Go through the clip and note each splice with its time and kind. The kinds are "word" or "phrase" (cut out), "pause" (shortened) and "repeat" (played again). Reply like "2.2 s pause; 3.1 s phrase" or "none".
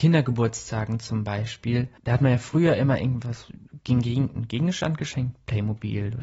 2.0 s pause